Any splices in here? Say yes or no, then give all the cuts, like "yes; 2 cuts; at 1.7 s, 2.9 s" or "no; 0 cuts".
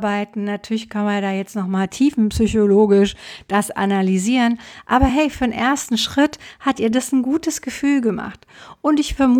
no; 0 cuts